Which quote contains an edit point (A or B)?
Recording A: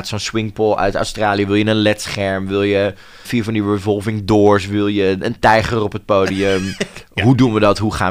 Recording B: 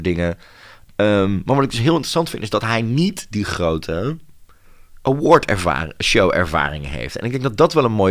A